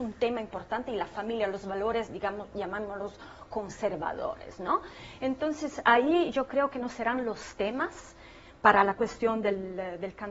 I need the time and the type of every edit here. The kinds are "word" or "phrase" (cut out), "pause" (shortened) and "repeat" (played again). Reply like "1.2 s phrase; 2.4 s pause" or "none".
none